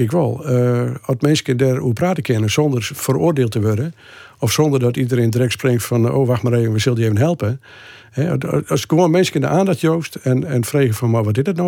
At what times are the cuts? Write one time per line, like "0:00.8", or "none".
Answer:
none